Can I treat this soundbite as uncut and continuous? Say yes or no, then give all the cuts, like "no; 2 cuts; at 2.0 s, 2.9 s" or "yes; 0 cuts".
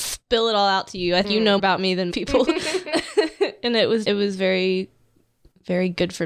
no; 4 cuts; at 1.2 s, 1.6 s, 2.1 s, 4.0 s